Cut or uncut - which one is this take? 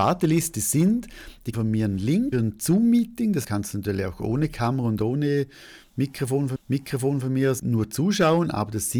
cut